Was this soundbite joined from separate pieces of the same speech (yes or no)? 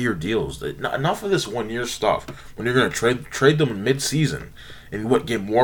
no